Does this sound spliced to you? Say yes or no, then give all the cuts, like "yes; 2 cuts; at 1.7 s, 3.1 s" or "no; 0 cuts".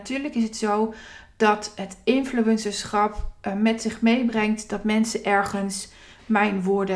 no; 0 cuts